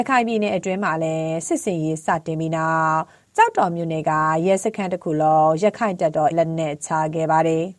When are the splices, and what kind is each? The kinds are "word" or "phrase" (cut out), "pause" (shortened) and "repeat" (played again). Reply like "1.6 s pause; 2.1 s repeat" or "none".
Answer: 6.3 s word